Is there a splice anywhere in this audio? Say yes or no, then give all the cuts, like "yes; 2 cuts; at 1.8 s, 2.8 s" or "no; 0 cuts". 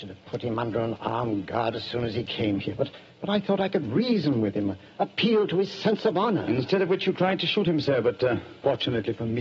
no; 0 cuts